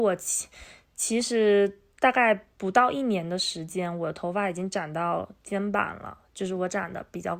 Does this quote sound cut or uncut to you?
cut